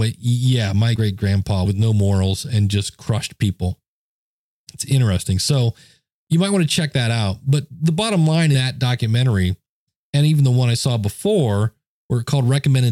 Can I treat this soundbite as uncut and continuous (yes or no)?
no